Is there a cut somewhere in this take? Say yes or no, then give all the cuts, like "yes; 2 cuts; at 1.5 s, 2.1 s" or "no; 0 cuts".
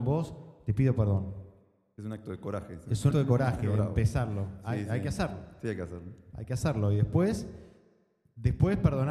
yes; 1 cut; at 3.1 s